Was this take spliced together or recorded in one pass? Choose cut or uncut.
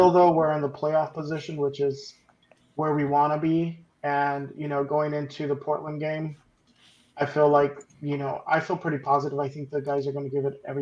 uncut